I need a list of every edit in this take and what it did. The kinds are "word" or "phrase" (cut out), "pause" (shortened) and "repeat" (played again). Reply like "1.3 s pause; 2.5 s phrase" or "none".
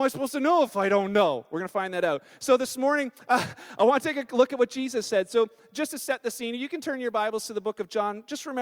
none